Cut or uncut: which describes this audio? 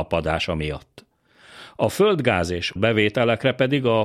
cut